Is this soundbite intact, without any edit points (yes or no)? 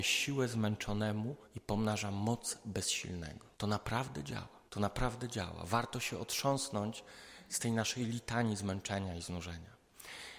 no